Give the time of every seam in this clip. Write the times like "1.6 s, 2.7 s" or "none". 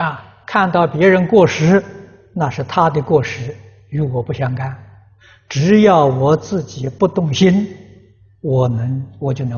none

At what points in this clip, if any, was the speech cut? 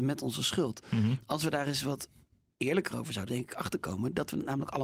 3.3 s

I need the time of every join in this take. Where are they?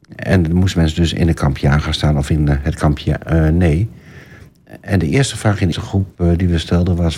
5.7 s

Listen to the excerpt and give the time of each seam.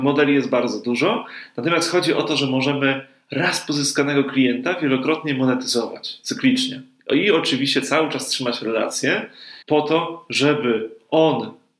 9.6 s

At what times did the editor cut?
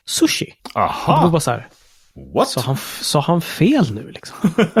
none

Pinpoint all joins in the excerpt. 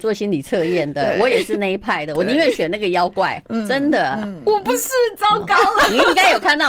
none

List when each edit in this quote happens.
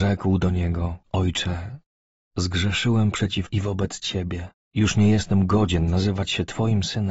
1.0 s, 3.5 s, 4.6 s

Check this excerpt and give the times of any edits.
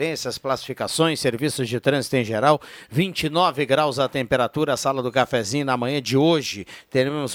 none

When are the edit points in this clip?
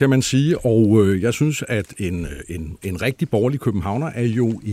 none

